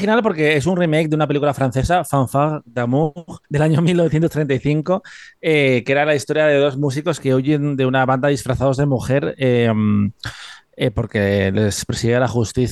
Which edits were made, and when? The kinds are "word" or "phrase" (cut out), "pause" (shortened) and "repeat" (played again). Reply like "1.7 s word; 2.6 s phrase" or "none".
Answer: 3.4 s pause